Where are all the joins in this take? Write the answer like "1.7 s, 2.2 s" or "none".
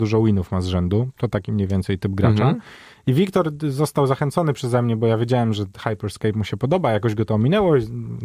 none

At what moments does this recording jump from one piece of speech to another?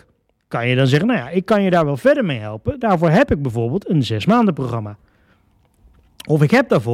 none

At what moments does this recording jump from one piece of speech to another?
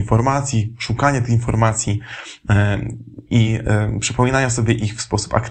none

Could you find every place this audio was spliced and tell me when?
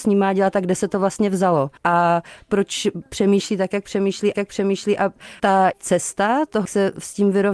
1.8 s, 4.3 s, 5.7 s, 6.6 s

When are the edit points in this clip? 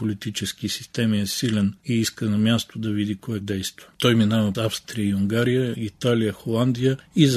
3.4 s, 3.9 s, 4.5 s

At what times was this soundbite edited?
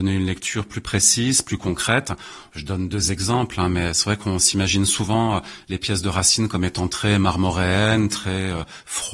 none

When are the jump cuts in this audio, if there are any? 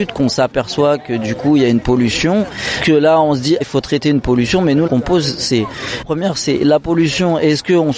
3.6 s, 4.9 s, 6.0 s

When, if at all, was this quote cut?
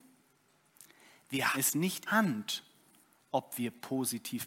1.5 s, 2.1 s

